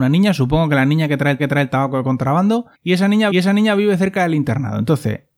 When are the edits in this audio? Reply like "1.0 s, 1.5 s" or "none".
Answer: 1.4 s, 2.7 s, 3.3 s